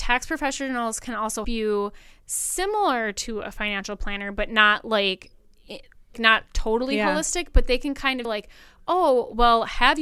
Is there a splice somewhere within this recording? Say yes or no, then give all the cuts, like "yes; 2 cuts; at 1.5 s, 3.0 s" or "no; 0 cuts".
yes; 3 cuts; at 1.4 s, 6.1 s, 8.2 s